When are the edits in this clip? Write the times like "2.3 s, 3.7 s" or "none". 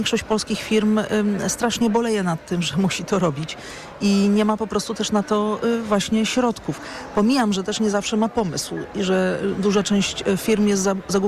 none